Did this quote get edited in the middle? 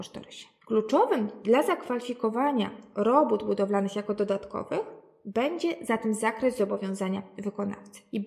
no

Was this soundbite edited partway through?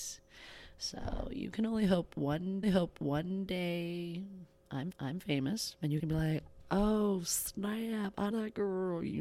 yes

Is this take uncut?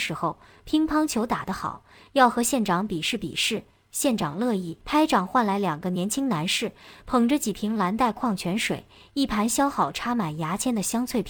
no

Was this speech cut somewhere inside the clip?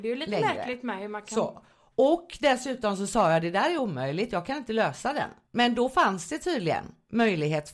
no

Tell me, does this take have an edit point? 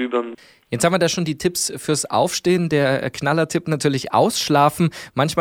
no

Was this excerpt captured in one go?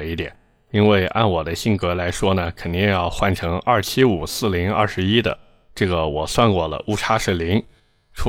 yes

